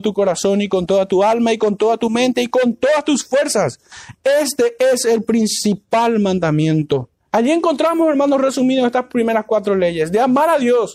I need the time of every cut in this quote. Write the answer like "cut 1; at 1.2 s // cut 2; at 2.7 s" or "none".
cut 1; at 7.2 s